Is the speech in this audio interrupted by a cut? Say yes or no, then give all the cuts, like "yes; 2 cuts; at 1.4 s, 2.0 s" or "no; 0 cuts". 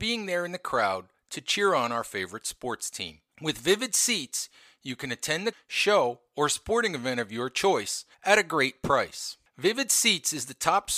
yes; 2 cuts; at 5.5 s, 8.1 s